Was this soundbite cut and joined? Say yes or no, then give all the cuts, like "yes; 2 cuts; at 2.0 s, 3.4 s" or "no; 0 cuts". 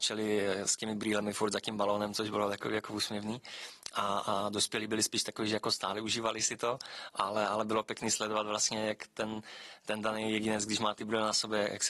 no; 0 cuts